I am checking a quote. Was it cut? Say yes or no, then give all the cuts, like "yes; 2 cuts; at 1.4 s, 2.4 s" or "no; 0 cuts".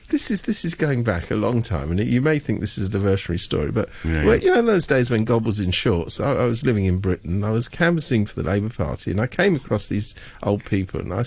yes; 1 cut; at 4.4 s